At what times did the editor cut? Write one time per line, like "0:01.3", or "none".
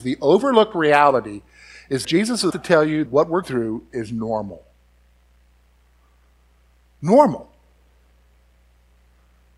0:02.0
0:02.5
0:03.1
0:03.4

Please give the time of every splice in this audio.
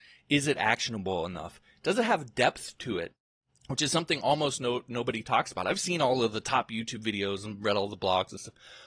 none

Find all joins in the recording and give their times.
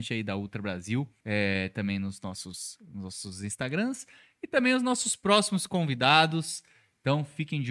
0:01.2

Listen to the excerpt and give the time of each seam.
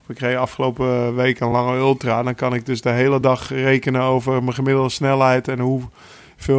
none

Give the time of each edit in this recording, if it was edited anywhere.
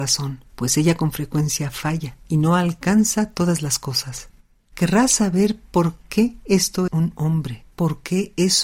0:06.9

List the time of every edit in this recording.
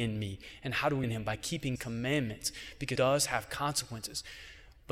0:01.0
0:01.8
0:03.0

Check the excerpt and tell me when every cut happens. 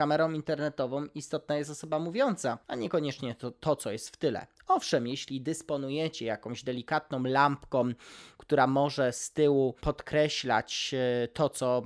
0:02.6
0:09.8

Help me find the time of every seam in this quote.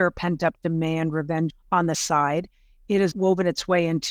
0:01.5
0:01.9
0:03.1

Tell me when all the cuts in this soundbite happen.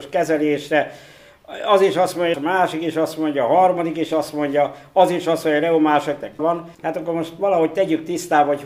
0:02.3
0:06.4
0:06.7

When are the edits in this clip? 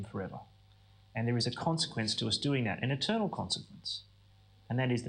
none

